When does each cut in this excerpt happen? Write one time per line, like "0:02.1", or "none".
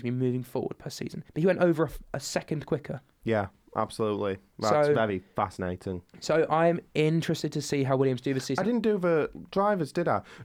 0:01.3
0:03.1
0:06.1